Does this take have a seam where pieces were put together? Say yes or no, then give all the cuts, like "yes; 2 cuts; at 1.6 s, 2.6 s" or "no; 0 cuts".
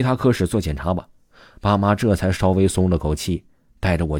no; 0 cuts